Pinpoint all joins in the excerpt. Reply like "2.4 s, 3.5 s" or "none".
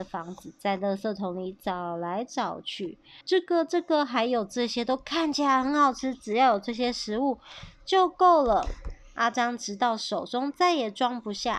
3.2 s